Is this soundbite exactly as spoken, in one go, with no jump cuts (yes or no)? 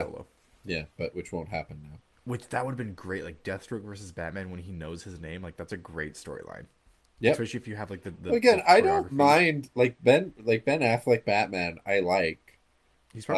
yes